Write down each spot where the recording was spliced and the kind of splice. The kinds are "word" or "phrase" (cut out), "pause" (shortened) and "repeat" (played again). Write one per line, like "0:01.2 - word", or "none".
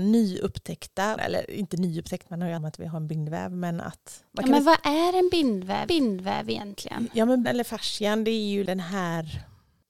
0:01.2 - word
0:02.6 - phrase
0:04.3 - pause
0:05.9 - repeat
0:07.4 - word